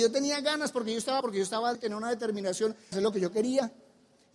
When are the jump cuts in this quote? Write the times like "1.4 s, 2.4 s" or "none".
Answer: 1.2 s, 1.7 s, 2.9 s